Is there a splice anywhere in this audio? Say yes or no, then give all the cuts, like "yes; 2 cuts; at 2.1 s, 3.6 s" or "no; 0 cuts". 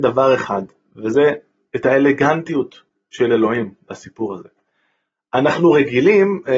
no; 0 cuts